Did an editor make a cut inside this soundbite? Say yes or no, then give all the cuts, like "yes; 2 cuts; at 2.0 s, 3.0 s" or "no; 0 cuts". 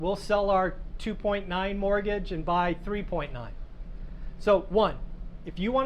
no; 0 cuts